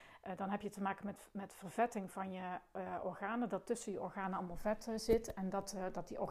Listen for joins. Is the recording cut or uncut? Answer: uncut